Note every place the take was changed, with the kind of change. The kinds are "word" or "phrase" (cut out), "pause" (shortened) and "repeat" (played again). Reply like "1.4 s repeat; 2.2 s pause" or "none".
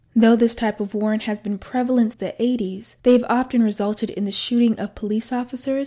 2.1 s word; 3.0 s pause